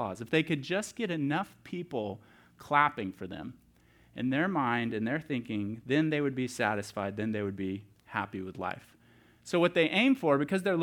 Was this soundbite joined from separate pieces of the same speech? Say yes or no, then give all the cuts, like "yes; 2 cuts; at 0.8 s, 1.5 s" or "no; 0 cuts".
no; 0 cuts